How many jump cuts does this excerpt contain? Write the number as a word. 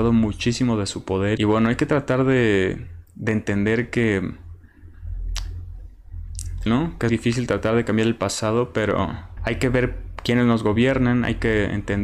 five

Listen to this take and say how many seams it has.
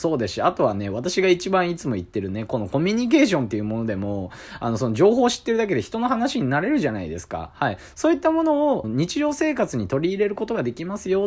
one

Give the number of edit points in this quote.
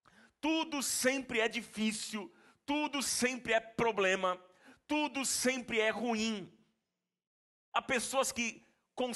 zero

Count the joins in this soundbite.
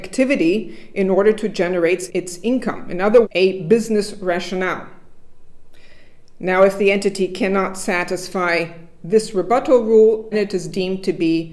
three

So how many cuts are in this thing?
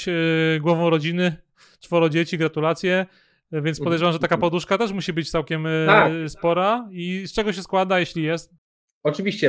zero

